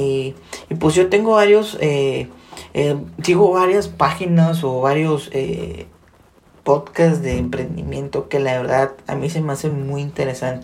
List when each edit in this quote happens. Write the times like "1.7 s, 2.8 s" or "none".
none